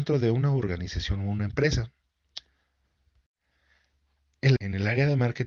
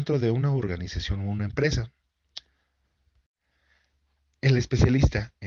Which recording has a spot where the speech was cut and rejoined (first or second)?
first